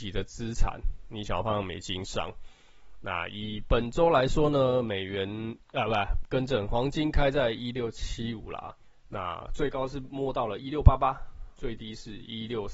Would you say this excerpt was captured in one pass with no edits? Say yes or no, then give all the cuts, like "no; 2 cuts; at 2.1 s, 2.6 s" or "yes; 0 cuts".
no; 3 cuts; at 6.2 s, 8.8 s, 11.6 s